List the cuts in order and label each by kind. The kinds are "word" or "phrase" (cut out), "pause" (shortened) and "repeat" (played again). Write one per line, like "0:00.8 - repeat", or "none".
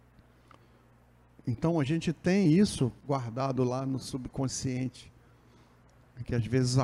none

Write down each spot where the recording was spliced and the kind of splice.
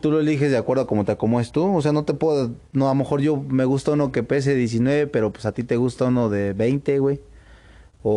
none

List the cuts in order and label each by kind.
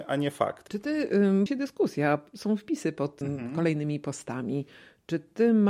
0:01.5 - phrase
0:03.2 - word

